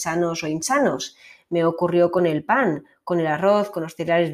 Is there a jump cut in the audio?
no; 0 cuts

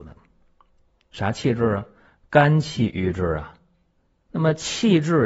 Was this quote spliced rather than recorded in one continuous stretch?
no; 0 cuts

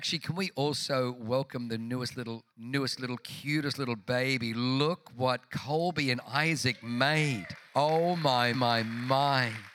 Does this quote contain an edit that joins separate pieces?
yes; 3 cuts; at 2.5 s, 7.7 s, 8.5 s

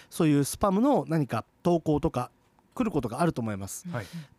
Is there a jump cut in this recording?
no; 0 cuts

